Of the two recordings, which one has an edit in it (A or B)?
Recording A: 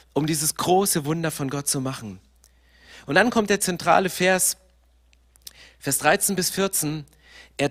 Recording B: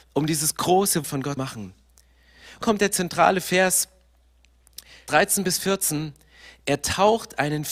B